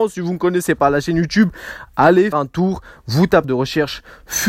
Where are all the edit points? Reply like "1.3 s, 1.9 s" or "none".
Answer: 2.3 s, 3.4 s